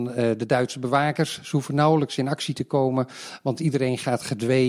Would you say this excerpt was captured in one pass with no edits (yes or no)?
yes